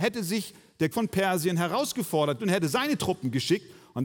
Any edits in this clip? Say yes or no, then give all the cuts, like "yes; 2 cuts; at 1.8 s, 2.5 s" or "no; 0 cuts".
yes; 2 cuts; at 0.9 s, 2.4 s